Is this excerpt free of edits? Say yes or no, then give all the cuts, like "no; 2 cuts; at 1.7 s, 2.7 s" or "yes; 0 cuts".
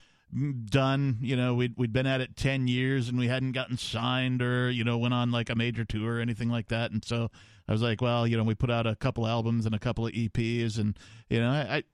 yes; 0 cuts